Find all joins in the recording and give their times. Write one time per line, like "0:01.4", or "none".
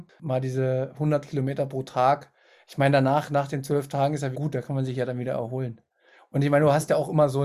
0:04.3